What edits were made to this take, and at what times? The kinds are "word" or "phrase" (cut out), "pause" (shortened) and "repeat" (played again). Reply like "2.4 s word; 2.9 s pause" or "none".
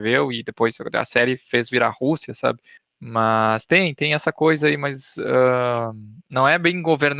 none